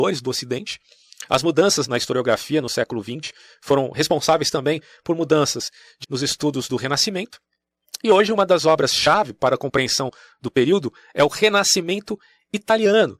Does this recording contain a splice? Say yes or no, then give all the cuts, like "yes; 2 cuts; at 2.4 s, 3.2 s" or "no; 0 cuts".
yes; 2 cuts; at 1.9 s, 6.0 s